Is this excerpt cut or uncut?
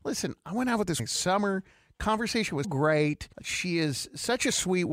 cut